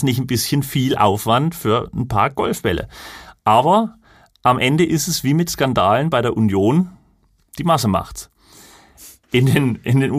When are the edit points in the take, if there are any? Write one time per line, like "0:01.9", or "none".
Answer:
none